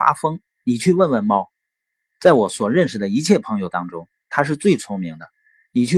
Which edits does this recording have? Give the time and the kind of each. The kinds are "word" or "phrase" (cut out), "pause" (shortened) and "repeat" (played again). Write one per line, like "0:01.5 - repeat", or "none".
none

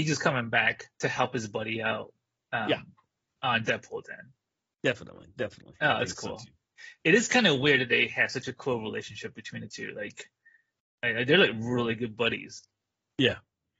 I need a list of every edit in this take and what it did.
none

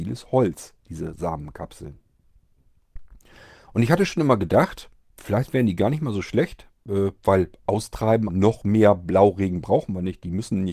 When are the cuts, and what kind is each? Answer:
0:08.3 - word

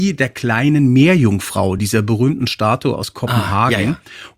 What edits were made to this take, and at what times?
none

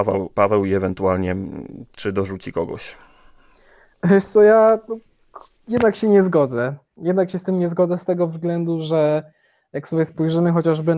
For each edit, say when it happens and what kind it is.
none

